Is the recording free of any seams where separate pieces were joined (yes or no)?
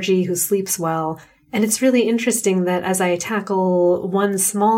yes